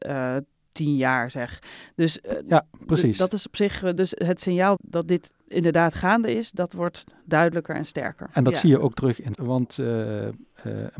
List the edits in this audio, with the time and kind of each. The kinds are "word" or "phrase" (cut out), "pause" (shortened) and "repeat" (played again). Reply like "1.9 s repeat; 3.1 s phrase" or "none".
4.8 s word; 9.3 s word